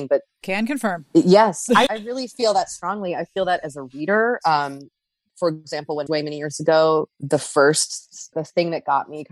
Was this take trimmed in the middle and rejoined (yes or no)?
yes